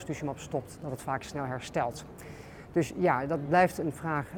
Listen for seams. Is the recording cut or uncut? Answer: uncut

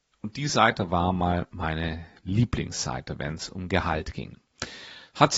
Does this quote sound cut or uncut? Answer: uncut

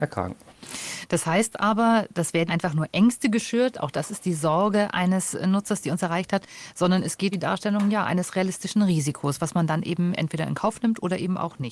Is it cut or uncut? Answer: cut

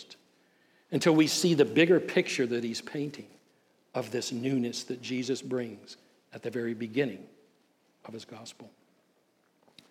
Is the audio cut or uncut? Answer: uncut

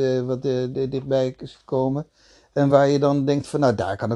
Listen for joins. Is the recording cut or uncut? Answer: uncut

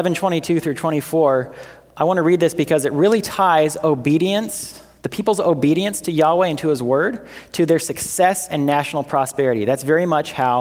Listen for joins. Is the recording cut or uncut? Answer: uncut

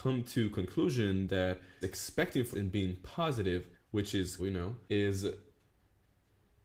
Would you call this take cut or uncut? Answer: cut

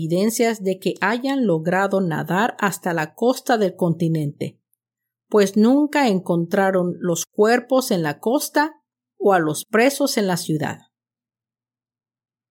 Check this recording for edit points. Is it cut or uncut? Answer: uncut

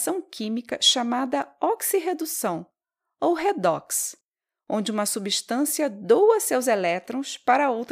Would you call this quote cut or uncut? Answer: uncut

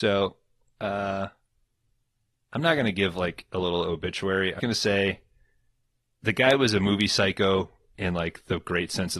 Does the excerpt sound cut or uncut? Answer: cut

